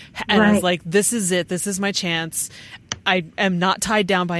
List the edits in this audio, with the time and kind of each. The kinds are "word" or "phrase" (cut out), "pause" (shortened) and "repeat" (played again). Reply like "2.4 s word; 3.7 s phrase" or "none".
none